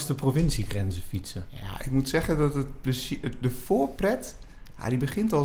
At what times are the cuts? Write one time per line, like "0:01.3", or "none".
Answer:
none